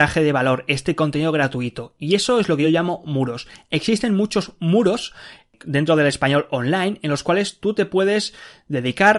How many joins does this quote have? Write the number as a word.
zero